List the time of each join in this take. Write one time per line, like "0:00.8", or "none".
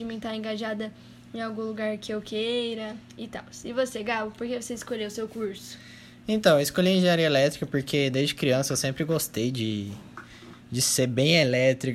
0:10.6